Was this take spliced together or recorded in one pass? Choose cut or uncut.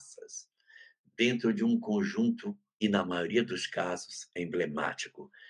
cut